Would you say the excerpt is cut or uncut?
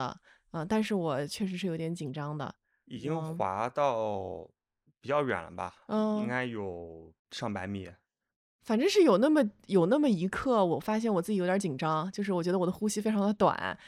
cut